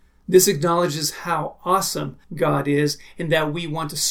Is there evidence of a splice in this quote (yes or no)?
yes